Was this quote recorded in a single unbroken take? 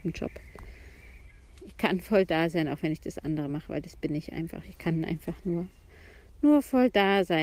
yes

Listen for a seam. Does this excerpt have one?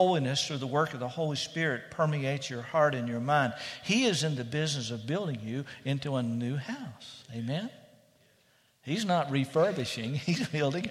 no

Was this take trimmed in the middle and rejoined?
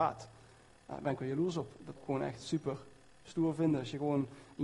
yes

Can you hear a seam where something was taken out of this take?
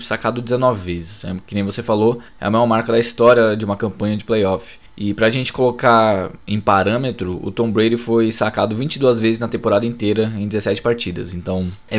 yes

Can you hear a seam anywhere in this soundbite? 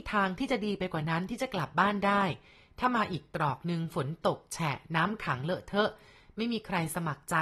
no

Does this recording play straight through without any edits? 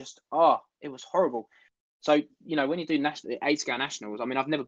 yes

